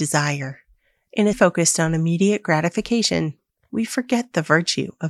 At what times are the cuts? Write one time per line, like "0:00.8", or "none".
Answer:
0:01.3